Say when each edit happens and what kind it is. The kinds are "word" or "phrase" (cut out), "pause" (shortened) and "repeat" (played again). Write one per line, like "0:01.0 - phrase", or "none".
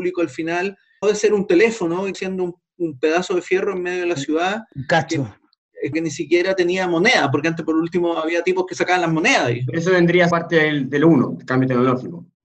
0:01.0 - word
0:02.1 - word
0:05.9 - word
0:10.3 - word